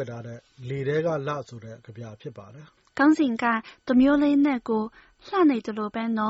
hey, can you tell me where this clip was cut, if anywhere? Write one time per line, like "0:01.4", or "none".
0:02.8